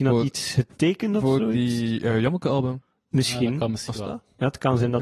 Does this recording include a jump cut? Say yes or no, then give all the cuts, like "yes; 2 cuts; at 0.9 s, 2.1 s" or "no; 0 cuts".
no; 0 cuts